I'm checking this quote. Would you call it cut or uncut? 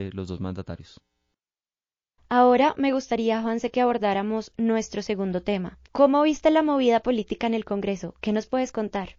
cut